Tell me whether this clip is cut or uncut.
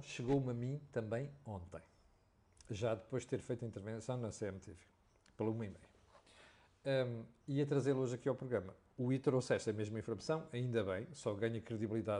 uncut